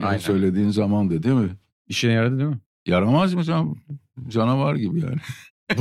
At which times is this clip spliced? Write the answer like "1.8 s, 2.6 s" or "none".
2.7 s